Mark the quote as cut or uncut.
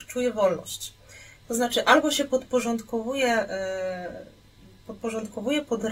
uncut